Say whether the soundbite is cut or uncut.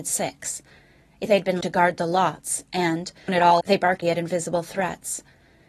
cut